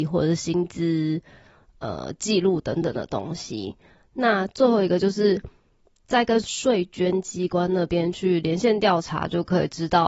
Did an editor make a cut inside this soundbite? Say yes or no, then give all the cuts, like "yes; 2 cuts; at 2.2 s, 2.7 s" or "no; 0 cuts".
no; 0 cuts